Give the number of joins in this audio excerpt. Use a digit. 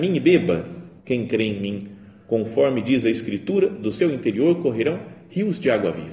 1